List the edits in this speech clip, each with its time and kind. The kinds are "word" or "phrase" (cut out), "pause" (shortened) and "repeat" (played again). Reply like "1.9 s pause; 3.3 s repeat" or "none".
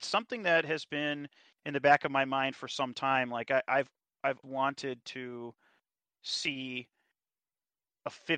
4.4 s word